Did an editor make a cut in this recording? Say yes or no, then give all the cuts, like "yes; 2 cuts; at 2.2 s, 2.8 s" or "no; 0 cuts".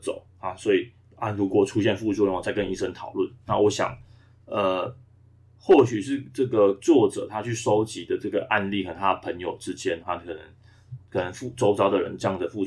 yes; 1 cut; at 10.0 s